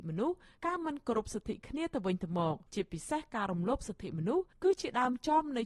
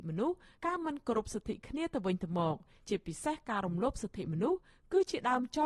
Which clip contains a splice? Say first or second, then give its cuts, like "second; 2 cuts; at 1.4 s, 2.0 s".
first; 2 cuts; at 2.7 s, 4.5 s